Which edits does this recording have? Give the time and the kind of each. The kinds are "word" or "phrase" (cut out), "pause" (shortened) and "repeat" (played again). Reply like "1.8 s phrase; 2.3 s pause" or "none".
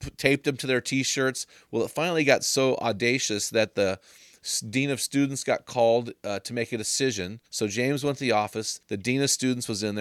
7.5 s pause; 8.8 s pause